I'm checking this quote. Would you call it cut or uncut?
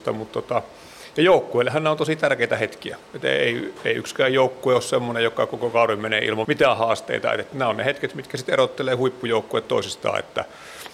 cut